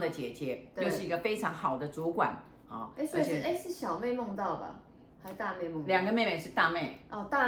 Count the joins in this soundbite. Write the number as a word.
zero